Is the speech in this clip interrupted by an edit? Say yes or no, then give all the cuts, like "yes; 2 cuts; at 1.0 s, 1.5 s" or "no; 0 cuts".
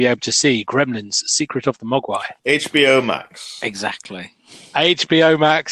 no; 0 cuts